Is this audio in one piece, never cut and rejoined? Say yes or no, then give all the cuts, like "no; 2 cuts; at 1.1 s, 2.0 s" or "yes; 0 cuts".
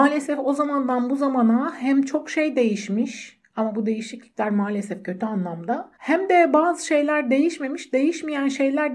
no; 1 cut; at 5.9 s